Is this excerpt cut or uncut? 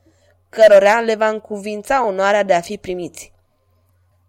uncut